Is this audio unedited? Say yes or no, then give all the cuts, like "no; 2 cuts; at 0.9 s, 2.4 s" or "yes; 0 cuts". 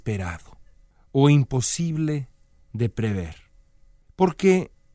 yes; 0 cuts